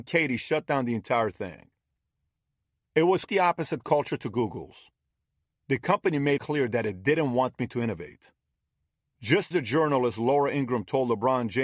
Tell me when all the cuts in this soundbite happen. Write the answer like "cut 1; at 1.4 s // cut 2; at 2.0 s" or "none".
cut 1; at 3.3 s // cut 2; at 6.4 s // cut 3; at 9.5 s